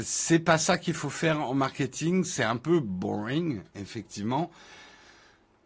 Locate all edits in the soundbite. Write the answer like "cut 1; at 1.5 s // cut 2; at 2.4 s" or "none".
none

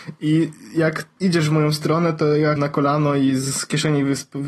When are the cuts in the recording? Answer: cut 1; at 1.2 s // cut 2; at 2.6 s

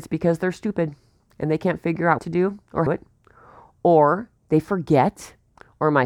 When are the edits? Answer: cut 1; at 2.2 s // cut 2; at 2.9 s // cut 3; at 4.4 s

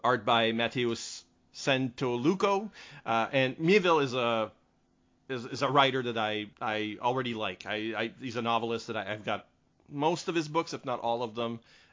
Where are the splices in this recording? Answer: cut 1; at 6.5 s

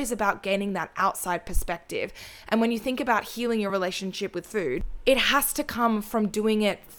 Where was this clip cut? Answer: none

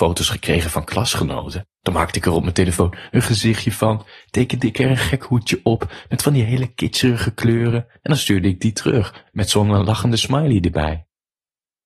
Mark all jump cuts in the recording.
none

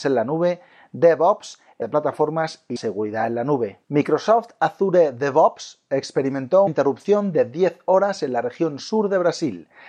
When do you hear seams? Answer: cut 1; at 1.8 s // cut 2; at 2.8 s // cut 3; at 3.8 s // cut 4; at 6.7 s

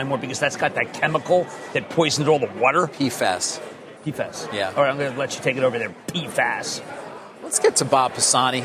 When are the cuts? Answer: cut 1; at 4.0 s

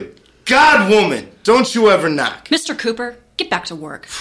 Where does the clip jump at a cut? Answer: none

